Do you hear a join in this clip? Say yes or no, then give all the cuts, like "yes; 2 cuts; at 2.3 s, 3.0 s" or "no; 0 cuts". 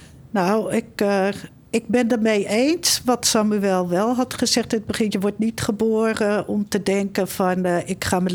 no; 0 cuts